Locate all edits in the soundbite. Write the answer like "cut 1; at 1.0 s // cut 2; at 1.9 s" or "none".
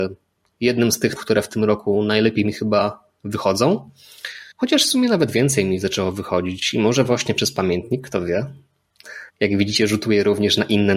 cut 1; at 1.2 s // cut 2; at 4.5 s // cut 3; at 9.3 s